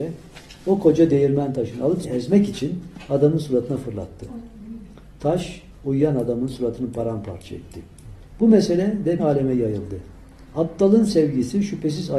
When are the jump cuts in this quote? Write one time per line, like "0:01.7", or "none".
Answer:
0:02.0
0:09.2
0:10.5